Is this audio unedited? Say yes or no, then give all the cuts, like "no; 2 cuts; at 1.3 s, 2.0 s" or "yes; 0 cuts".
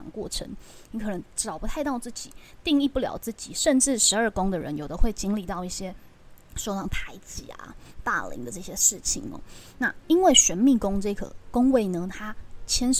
no; 1 cut; at 6.4 s